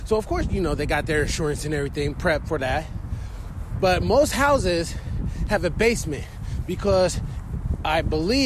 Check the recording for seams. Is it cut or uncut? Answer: uncut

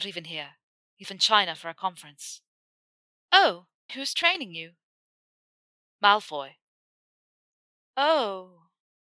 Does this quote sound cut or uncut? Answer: cut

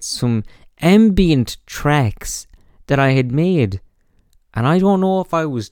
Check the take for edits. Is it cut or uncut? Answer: uncut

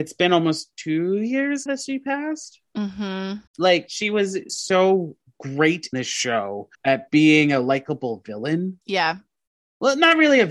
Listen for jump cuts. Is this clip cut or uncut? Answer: cut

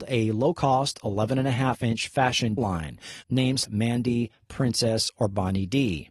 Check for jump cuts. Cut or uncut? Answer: cut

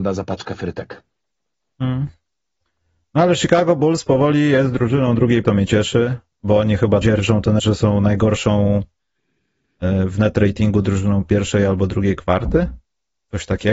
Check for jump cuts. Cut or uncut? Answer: cut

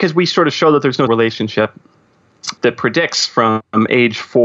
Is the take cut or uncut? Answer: cut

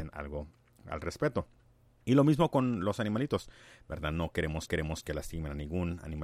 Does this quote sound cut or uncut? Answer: cut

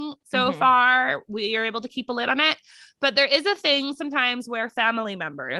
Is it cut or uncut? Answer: uncut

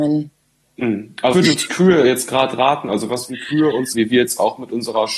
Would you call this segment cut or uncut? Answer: cut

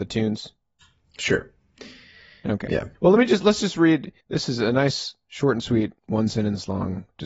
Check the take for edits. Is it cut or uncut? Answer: cut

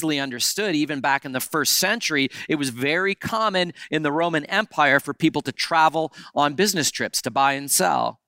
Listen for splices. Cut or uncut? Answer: uncut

